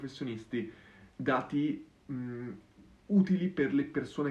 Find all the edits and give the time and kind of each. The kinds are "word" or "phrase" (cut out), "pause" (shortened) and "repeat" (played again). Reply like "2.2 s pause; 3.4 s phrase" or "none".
1.1 s pause